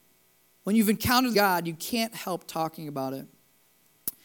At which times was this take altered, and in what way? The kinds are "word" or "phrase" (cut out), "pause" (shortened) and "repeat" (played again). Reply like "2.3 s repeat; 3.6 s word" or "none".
1.3 s phrase